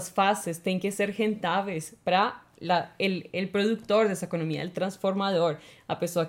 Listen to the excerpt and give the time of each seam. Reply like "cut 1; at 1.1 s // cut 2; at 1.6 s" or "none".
none